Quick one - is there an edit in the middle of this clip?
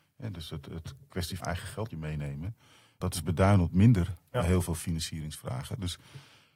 yes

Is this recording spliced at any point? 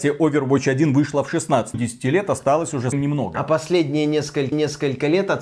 yes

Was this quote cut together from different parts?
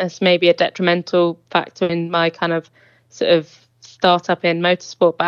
no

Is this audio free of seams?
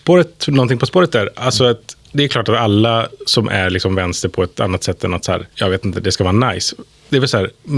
no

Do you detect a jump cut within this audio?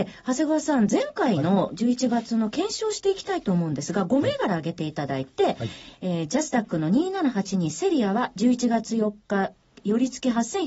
no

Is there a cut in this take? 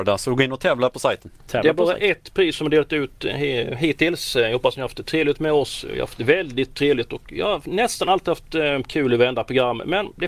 no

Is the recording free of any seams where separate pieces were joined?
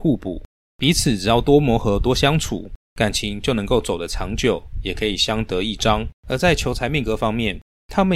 no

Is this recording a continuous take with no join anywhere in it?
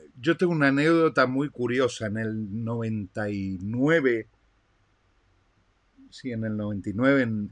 yes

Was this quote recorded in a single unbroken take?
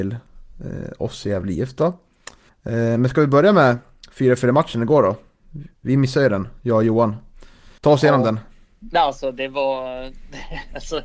no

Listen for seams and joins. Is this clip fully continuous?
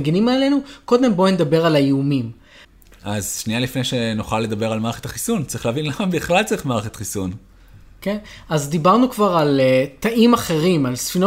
yes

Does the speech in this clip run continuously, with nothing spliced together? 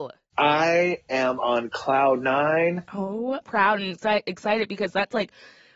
no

